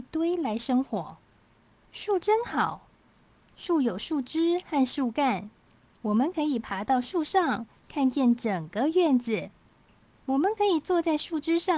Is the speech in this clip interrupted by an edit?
no; 0 cuts

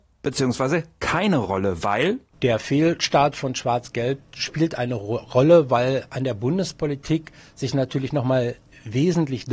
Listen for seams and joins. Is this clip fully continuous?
yes; 0 cuts

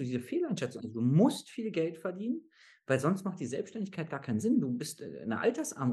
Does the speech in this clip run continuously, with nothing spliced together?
yes; 0 cuts

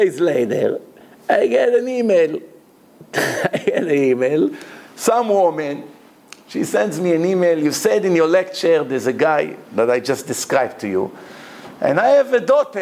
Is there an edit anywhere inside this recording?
no; 0 cuts

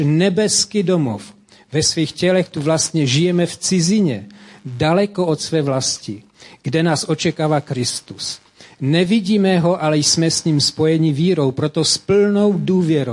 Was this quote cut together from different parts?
no; 0 cuts

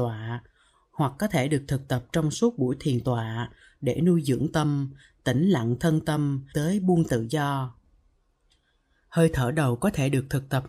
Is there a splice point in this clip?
yes; 3 cuts; at 4.5 s, 6.5 s, 7.1 s

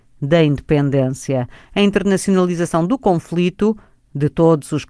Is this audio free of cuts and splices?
yes; 0 cuts

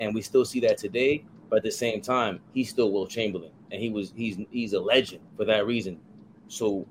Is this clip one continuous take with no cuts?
no; 1 cut; at 5.3 s

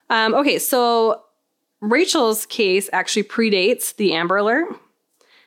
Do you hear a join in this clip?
no; 0 cuts

